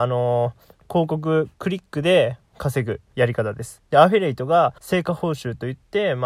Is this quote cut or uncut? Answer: cut